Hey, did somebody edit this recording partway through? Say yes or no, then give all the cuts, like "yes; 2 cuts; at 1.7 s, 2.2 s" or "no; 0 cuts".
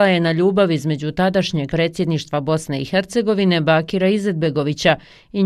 yes; 1 cut; at 1.7 s